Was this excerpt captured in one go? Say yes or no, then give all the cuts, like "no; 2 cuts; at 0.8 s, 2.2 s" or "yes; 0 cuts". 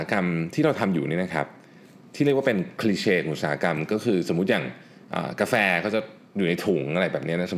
yes; 0 cuts